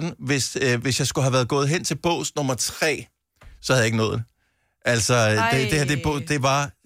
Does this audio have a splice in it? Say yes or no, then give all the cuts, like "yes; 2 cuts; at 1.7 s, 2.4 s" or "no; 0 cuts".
no; 0 cuts